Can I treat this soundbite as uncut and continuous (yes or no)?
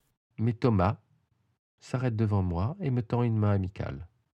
yes